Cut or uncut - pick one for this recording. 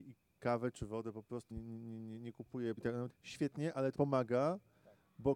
cut